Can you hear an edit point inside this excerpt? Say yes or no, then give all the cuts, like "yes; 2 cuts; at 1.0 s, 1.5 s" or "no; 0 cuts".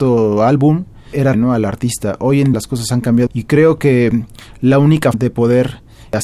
yes; 4 cuts; at 1.3 s, 2.5 s, 3.3 s, 5.1 s